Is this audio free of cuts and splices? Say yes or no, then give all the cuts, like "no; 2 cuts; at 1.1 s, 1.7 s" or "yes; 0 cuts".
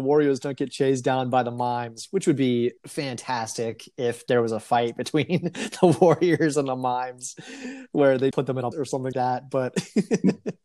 no; 4 cuts; at 2.8 s, 8.3 s, 8.7 s, 9.1 s